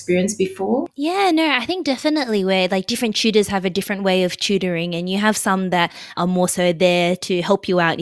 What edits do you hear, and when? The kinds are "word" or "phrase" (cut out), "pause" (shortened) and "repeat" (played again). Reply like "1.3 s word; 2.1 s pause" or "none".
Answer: 6.1 s word